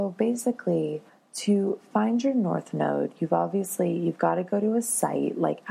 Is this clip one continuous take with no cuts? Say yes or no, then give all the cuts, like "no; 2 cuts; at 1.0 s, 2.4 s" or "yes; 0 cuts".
no; 1 cut; at 1.1 s